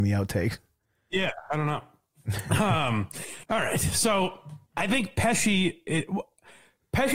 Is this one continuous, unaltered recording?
no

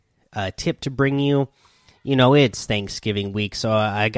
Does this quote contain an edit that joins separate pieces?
no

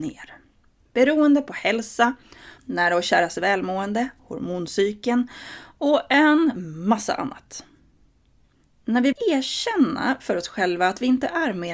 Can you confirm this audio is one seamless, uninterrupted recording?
no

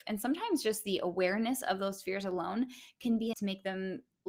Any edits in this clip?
yes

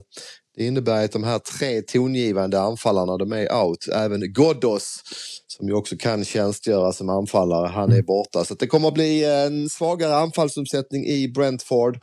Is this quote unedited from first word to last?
yes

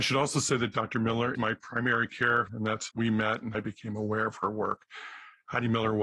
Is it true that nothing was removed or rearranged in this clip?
no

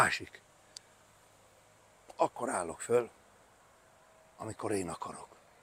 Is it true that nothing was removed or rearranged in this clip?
yes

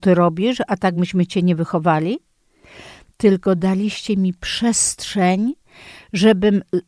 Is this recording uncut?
yes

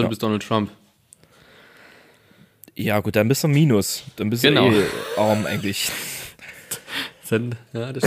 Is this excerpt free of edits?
yes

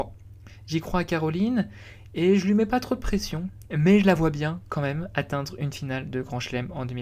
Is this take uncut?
yes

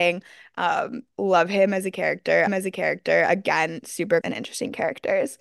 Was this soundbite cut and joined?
yes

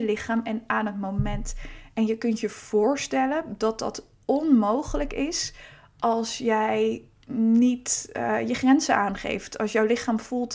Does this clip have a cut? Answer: no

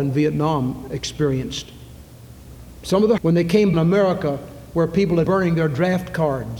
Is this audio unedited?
no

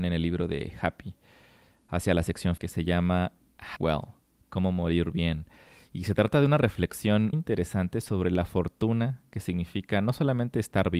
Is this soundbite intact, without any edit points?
no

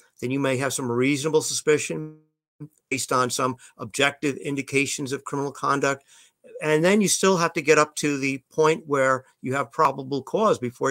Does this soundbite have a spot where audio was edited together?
no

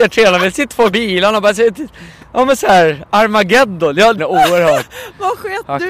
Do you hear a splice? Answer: yes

